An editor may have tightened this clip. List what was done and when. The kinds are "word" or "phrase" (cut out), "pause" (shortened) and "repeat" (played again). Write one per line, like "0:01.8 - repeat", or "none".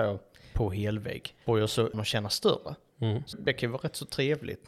0:01.4 - pause
0:01.9 - word
0:03.3 - word